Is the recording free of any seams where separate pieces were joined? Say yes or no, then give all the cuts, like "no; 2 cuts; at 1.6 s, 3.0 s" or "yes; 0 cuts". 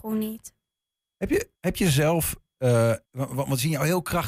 no; 2 cuts; at 1.6 s, 3.0 s